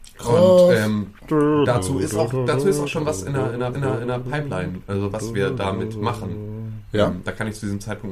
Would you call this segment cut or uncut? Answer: cut